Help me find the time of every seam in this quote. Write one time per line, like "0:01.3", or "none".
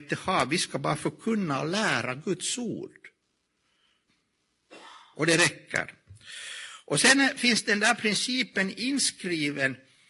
none